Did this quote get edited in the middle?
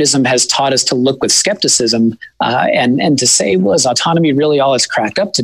no; 0 cuts

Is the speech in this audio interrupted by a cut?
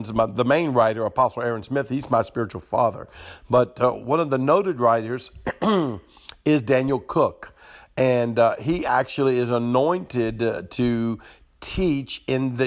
no; 0 cuts

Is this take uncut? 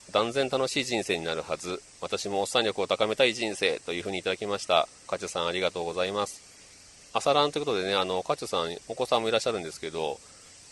no; 1 cut; at 5.0 s

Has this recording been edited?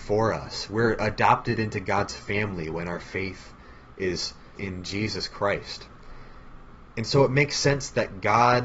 yes; 1 cut; at 4.6 s

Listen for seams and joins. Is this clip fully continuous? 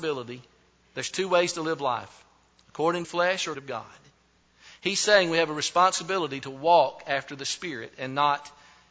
no; 2 cuts; at 3.0 s, 3.5 s

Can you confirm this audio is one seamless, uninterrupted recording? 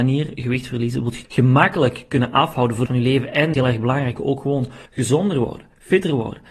no; 5 cuts; at 1.2 s, 2.9 s, 3.5 s, 4.2 s, 4.9 s

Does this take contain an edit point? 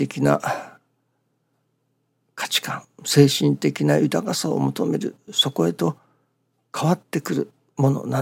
no; 0 cuts

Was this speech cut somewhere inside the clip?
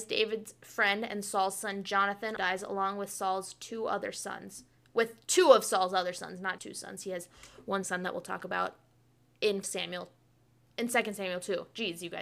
yes; 4 cuts; at 2.4 s, 6.6 s, 7.8 s, 9.6 s

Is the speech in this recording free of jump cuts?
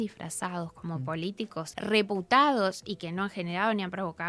no; 1 cut; at 1.7 s

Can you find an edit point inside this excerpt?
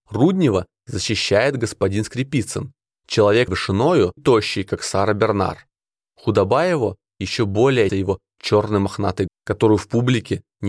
yes; 4 cuts; at 3.5 s, 4.2 s, 7.9 s, 9.3 s

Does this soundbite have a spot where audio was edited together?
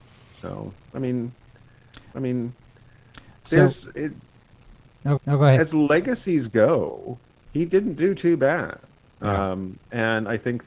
yes; 2 cuts; at 2.1 s, 5.2 s

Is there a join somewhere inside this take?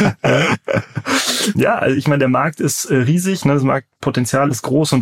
yes; 1 cut; at 1.5 s

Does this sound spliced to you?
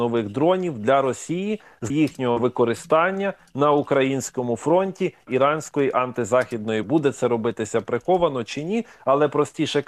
yes; 3 cuts; at 1.9 s, 5.3 s, 6.8 s

